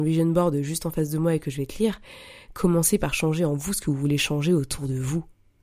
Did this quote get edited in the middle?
no; 0 cuts

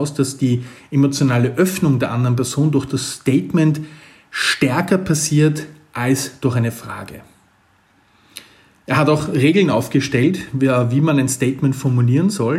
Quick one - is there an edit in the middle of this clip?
no; 0 cuts

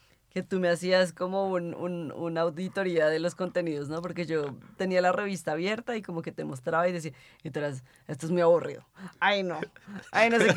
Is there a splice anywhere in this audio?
no; 0 cuts

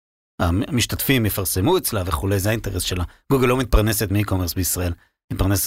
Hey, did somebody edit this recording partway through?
no; 0 cuts

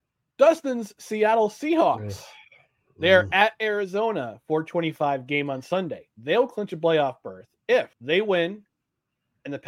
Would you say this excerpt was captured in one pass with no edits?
no; 2 cuts; at 6.1 s, 7.9 s

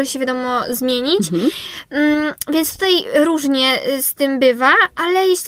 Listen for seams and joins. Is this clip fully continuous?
yes; 0 cuts

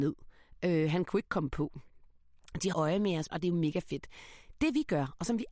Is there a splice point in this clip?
yes; 2 cuts; at 2.7 s, 3.3 s

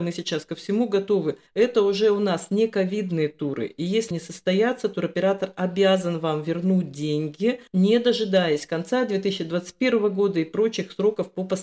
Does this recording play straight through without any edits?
no; 3 cuts; at 1.5 s, 4.1 s, 7.7 s

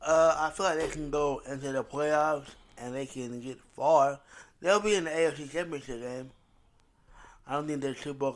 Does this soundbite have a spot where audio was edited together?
no; 0 cuts

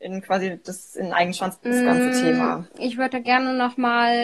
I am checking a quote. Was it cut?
yes; 2 cuts; at 1.6 s, 2.7 s

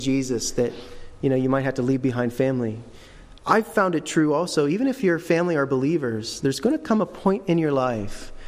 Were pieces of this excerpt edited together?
no; 0 cuts

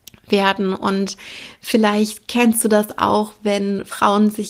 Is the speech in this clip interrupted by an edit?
no; 0 cuts

